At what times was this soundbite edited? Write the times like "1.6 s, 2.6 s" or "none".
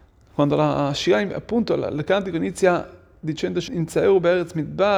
3.7 s

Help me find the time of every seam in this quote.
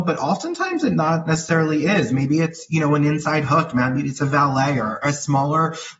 none

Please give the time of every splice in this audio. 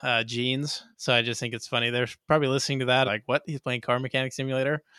0.9 s, 3.1 s

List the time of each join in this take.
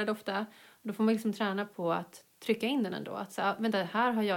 none

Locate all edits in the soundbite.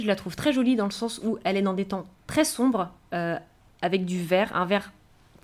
none

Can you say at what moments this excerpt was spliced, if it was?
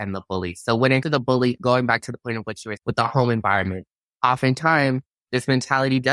1.0 s, 2.8 s

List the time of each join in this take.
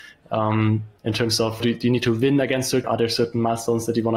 1.0 s, 1.6 s, 2.8 s

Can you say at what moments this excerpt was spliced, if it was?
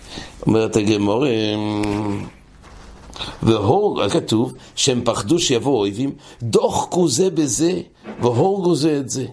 4.1 s

